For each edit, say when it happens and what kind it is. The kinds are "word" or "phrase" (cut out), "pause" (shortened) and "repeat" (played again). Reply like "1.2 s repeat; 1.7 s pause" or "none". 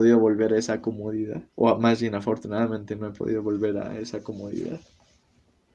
1.5 s pause